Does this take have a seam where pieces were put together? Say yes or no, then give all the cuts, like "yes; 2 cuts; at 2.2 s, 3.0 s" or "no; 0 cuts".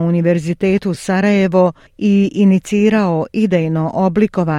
no; 0 cuts